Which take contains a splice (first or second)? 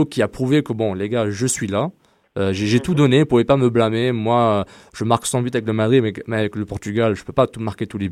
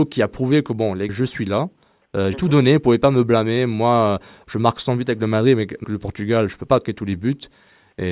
second